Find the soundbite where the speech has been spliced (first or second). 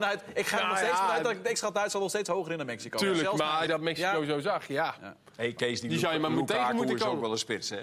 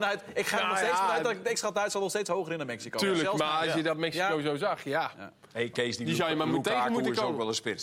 first